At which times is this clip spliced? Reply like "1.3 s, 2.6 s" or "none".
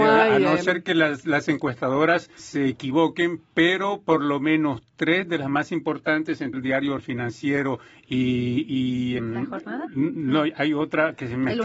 2.4 s, 6.5 s, 7.0 s, 9.2 s